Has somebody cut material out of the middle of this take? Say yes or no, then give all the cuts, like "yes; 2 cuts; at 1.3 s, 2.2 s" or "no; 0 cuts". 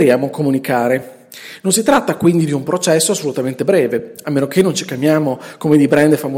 no; 0 cuts